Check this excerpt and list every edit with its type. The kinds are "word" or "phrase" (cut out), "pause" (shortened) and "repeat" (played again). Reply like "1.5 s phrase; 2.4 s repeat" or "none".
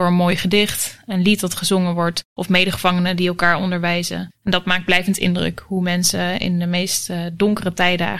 none